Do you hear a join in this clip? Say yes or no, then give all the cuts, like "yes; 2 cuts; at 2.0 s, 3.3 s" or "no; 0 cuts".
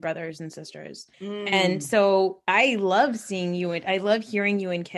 yes; 1 cut; at 1.1 s